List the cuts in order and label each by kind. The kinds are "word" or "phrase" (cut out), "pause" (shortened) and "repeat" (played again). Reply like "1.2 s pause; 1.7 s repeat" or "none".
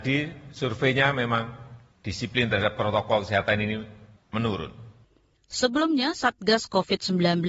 none